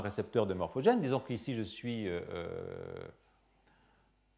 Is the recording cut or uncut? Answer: uncut